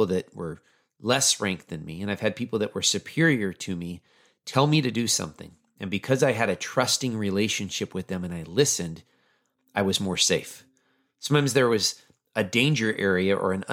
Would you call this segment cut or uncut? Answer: uncut